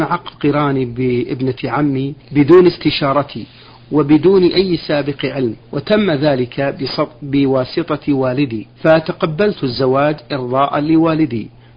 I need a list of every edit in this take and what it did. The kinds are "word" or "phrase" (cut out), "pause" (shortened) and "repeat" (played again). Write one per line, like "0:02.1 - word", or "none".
0:02.2 - pause
0:05.6 - pause
0:08.7 - pause